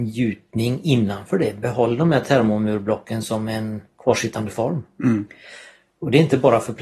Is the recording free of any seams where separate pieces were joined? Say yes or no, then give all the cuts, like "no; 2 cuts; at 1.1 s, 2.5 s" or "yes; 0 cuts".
yes; 0 cuts